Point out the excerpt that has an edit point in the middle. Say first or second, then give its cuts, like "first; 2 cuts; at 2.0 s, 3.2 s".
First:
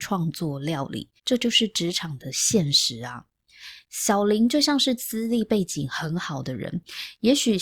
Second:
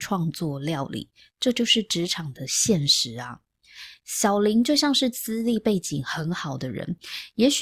first; 1 cut; at 1.2 s